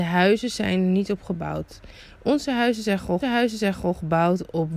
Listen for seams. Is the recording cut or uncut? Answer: cut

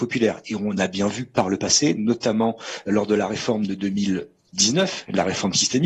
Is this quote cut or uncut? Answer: uncut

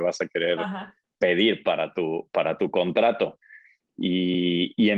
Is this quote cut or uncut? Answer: uncut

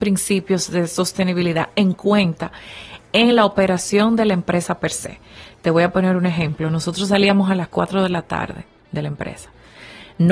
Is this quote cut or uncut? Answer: uncut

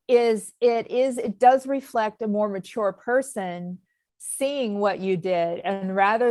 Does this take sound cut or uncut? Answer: uncut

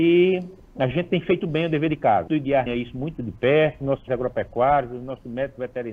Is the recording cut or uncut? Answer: cut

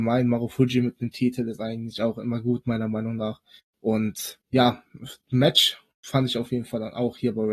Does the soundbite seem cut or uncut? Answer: cut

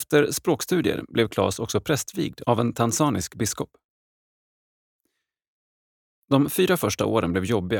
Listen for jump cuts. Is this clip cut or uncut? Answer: uncut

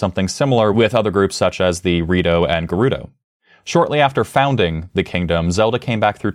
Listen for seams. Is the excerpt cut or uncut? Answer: uncut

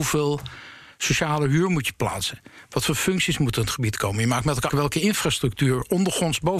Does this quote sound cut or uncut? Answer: cut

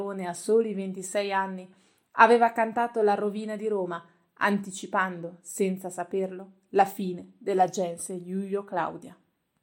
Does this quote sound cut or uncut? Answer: uncut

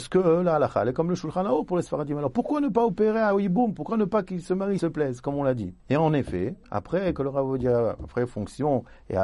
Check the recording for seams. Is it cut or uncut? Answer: cut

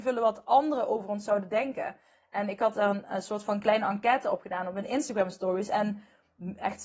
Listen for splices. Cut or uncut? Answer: uncut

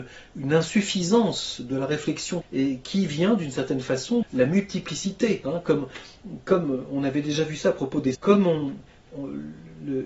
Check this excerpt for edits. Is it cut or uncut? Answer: cut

